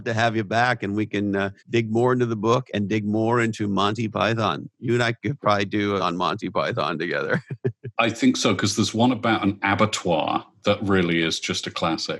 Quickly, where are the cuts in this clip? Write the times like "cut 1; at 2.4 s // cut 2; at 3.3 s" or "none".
cut 1; at 1.6 s // cut 2; at 6.0 s